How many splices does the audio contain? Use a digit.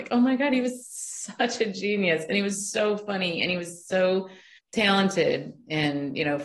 1